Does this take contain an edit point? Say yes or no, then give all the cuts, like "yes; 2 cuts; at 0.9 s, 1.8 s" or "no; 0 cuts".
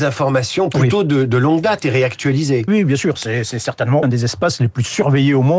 yes; 2 cuts; at 2.7 s, 4.0 s